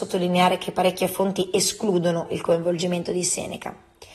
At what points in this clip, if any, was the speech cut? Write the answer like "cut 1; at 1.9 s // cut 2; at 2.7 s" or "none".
none